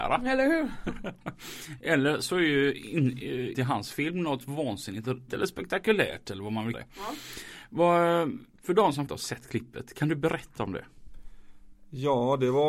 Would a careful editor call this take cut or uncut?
cut